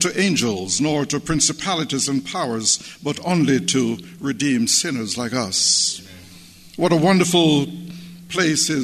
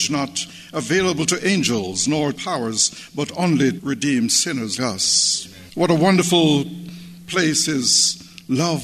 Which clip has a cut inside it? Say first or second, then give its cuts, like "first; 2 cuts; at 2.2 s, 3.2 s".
second; 4 cuts; at 2.3 s, 3.8 s, 4.8 s, 5.7 s